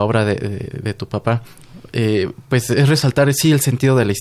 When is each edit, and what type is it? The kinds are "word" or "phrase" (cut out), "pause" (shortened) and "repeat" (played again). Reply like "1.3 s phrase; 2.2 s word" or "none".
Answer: none

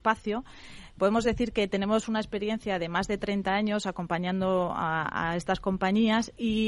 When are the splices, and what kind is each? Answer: none

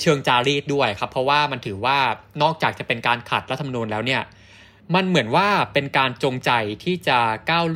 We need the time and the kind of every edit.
none

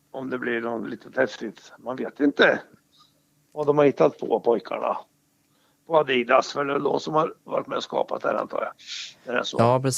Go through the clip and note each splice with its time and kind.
none

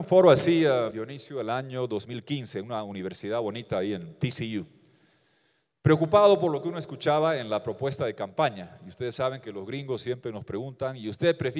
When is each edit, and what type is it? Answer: 0.9 s word

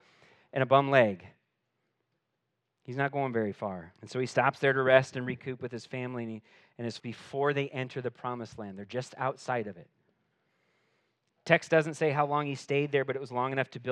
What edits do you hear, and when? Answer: 4.0 s pause; 7.0 s word

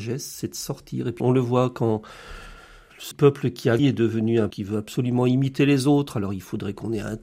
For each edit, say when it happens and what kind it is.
1.2 s word; 3.1 s word; 3.8 s word; 4.5 s word

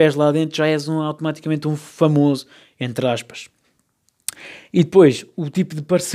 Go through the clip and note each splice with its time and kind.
none

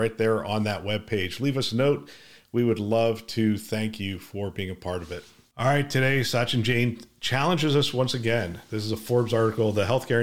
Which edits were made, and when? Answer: none

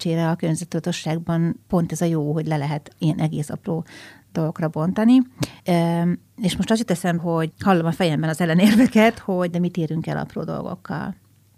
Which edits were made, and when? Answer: 1.6 s pause; 5.6 s pause; 7.2 s word; 7.5 s word; 9.5 s phrase

